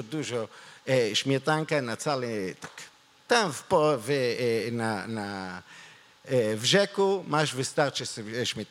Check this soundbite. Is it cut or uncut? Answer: uncut